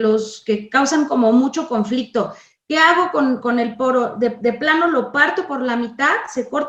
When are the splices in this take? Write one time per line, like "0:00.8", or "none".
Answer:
none